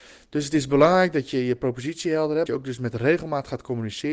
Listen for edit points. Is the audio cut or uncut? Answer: cut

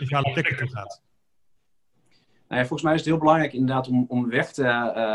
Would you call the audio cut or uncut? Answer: uncut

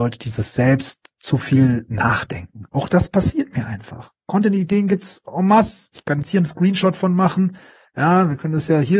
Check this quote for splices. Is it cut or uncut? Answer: uncut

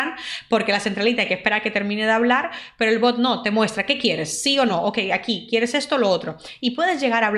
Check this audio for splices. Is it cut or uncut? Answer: uncut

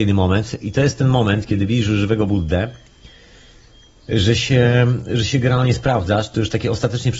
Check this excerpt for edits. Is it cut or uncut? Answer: uncut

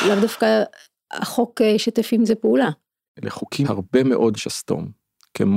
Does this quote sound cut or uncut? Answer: cut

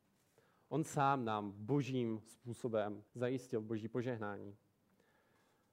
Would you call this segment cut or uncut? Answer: cut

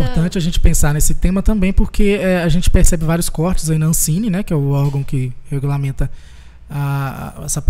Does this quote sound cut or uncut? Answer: uncut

